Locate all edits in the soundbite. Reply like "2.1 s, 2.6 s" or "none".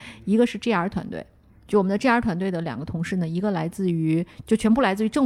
none